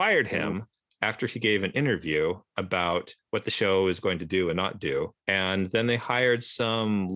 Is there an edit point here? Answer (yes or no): yes